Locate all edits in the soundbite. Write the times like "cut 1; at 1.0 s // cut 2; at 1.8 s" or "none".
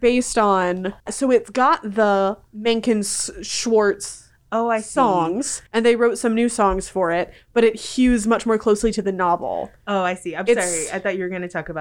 cut 1; at 1.0 s // cut 2; at 5.7 s